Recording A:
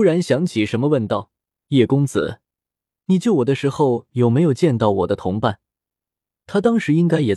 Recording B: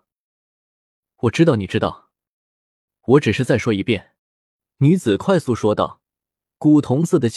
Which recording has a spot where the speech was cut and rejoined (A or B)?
B